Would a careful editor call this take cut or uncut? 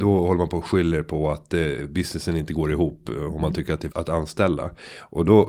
cut